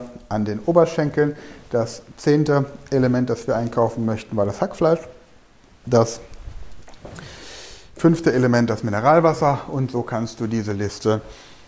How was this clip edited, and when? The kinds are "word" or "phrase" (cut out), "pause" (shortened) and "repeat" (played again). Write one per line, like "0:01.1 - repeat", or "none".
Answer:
none